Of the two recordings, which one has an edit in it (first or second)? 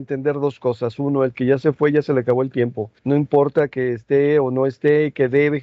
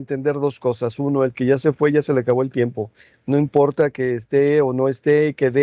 first